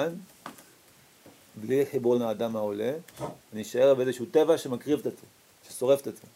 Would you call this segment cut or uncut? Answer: cut